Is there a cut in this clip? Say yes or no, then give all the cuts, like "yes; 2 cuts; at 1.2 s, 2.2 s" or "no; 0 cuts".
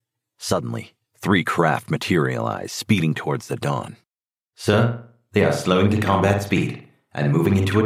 no; 0 cuts